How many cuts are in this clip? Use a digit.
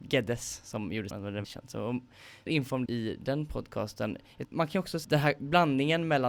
6